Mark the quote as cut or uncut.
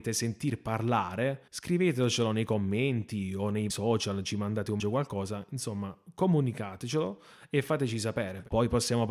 cut